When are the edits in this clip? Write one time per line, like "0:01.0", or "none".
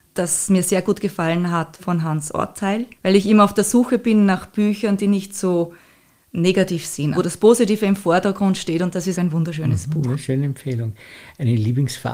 0:01.8
0:02.9
0:07.1
0:09.1